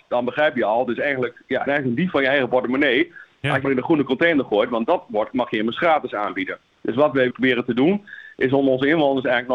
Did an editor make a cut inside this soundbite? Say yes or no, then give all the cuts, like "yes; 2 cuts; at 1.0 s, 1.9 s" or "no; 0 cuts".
yes; 3 cuts; at 1.7 s, 3.6 s, 7.3 s